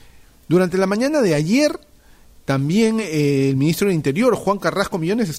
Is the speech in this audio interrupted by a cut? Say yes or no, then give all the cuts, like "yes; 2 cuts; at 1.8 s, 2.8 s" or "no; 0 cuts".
no; 0 cuts